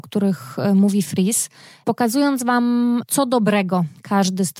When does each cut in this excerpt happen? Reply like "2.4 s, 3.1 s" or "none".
none